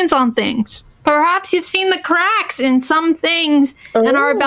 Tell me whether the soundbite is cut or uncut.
uncut